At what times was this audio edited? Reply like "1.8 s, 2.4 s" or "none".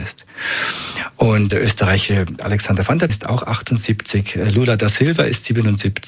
1.5 s, 2.4 s, 3.1 s